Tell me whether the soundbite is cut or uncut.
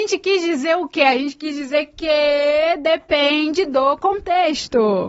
uncut